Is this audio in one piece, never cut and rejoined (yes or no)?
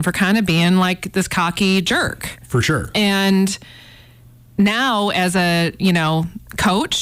yes